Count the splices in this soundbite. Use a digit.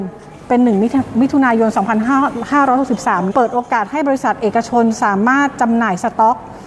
1